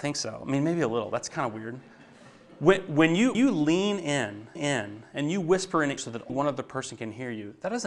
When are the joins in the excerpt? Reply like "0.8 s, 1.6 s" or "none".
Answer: 3.3 s, 4.6 s, 6.0 s, 6.3 s